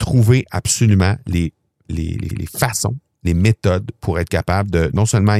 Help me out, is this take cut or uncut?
cut